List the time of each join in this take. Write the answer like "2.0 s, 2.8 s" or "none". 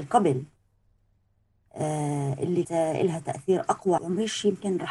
2.6 s, 4.0 s

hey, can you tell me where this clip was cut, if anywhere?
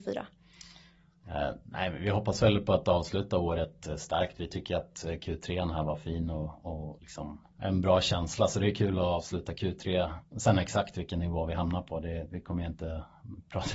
7.5 s

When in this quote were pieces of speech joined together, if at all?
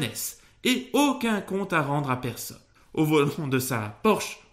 2.8 s

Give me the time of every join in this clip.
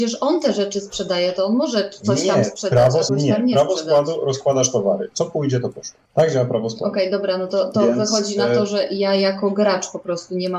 3.1 s, 6.0 s, 7.5 s

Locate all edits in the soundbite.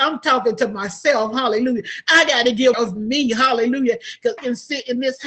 2.7 s, 4.4 s

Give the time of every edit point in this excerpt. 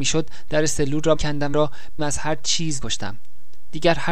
1.2 s, 1.5 s, 2.0 s, 2.8 s

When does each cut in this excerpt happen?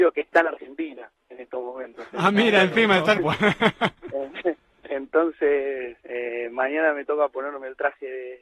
3.2 s, 6.0 s

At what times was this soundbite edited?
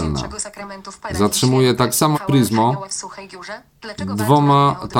2.1 s

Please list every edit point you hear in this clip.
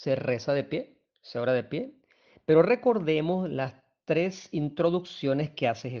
none

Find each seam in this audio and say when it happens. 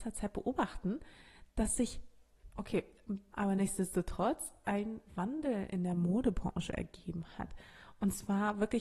3.3 s

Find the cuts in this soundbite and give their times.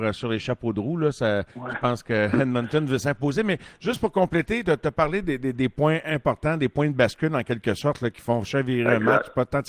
1.5 s, 4.6 s

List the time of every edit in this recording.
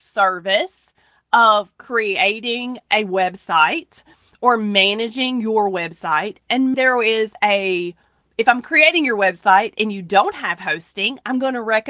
6.7 s

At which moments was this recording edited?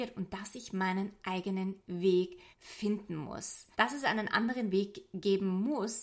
2.5 s, 3.7 s

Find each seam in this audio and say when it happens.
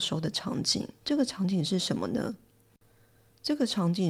1.0 s

